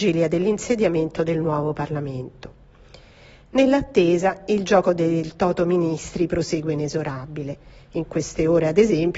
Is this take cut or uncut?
uncut